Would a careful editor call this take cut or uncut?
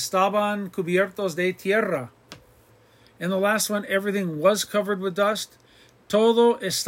uncut